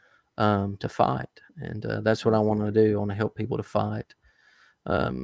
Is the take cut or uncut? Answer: cut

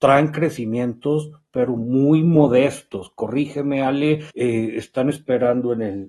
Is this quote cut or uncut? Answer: cut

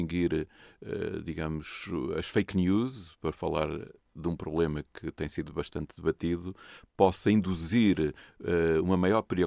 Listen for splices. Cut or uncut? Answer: uncut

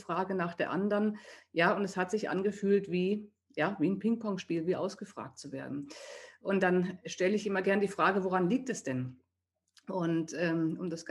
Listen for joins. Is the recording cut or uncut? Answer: uncut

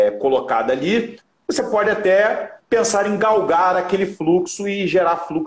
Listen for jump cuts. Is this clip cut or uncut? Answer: uncut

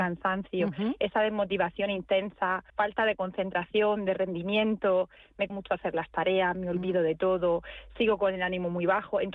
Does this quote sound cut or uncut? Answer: cut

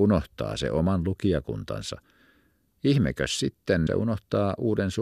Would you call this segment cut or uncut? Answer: cut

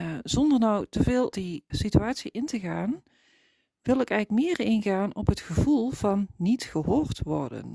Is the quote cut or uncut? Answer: cut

